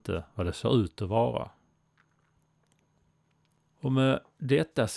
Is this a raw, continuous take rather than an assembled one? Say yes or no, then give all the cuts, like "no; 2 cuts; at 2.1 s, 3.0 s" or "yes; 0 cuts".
yes; 0 cuts